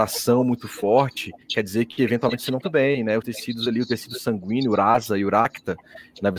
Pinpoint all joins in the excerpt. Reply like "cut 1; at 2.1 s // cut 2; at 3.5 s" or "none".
cut 1; at 1.4 s // cut 2; at 2.6 s // cut 3; at 3.2 s